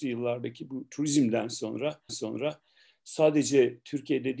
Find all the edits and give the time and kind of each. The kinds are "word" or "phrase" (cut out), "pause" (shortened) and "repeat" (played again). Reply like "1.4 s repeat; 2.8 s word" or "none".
2.1 s repeat